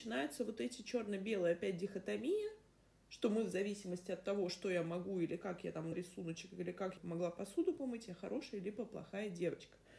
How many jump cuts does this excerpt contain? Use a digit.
2